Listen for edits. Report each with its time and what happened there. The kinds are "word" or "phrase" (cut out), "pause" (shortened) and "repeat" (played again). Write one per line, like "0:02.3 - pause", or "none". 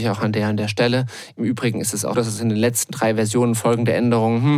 0:02.1 - word